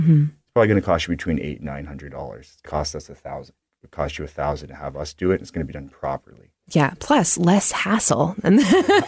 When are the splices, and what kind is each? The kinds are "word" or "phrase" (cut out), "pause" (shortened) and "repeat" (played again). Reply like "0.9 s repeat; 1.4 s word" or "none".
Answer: 2.7 s word